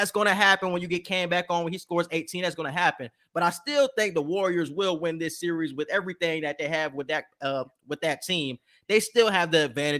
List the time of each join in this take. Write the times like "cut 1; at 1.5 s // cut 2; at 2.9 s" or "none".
none